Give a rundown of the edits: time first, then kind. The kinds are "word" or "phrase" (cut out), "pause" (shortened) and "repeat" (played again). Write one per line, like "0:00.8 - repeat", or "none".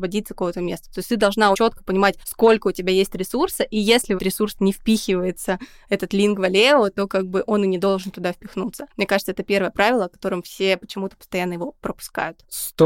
0:01.5 - word
0:02.2 - pause
0:04.2 - word
0:08.9 - pause